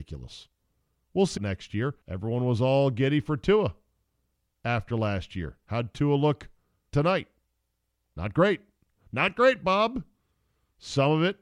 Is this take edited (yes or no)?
yes